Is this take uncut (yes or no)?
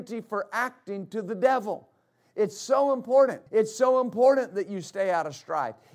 no